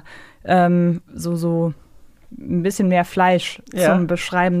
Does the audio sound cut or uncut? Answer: uncut